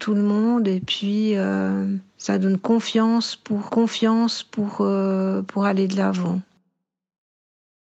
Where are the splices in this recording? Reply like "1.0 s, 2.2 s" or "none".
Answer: 2.1 s, 3.7 s